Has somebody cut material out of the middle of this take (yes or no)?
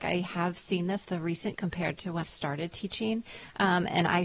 yes